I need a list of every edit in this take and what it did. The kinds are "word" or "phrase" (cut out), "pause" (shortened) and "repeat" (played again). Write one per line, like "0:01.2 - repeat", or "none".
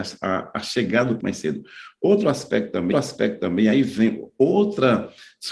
0:01.2 - word
0:02.9 - repeat

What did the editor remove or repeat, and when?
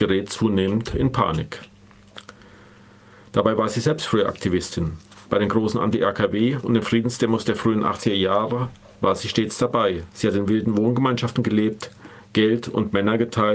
none

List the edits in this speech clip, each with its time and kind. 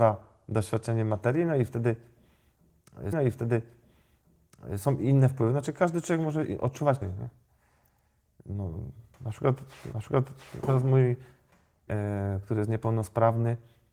0:03.1 - repeat
0:07.0 - word
0:09.9 - repeat
0:11.9 - word

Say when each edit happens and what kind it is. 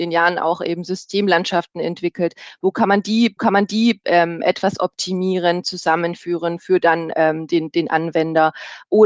0:03.4 - repeat

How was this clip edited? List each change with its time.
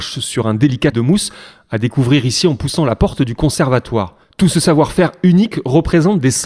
0:00.9 - word

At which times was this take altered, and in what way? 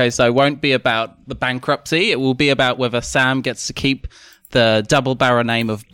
none

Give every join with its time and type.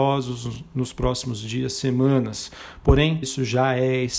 0:03.2 - word

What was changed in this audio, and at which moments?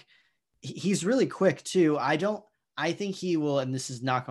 none

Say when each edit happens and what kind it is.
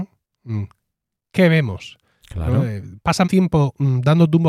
0:03.2 - word

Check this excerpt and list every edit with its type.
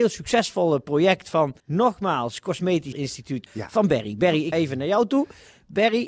0:01.6 - pause
0:02.9 - word
0:03.5 - word
0:04.5 - word

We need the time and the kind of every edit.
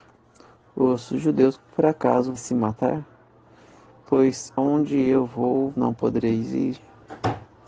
0:01.6 - word
0:02.4 - word
0:04.6 - phrase
0:05.7 - word

